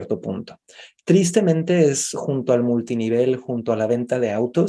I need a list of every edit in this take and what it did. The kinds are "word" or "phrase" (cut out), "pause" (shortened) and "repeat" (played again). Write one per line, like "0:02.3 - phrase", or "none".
none